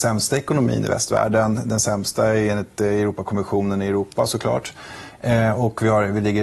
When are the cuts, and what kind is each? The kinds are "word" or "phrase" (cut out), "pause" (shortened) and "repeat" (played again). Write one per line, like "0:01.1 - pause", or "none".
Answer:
none